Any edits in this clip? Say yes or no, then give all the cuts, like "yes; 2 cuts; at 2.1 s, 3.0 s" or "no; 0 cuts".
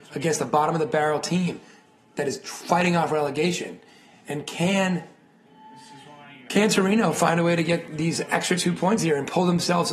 no; 0 cuts